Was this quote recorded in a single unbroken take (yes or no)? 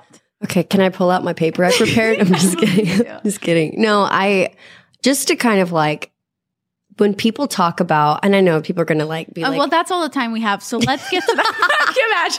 yes